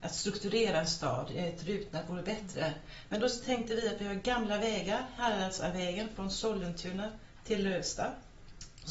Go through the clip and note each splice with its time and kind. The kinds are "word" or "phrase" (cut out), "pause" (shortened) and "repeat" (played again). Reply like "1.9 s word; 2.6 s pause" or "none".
none